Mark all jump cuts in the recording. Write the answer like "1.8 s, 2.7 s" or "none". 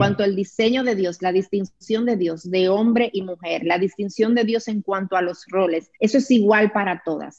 6.0 s